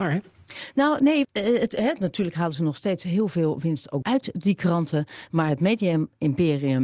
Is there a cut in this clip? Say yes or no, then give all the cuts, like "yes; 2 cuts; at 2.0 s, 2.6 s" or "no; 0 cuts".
yes; 2 cuts; at 1.2 s, 4.0 s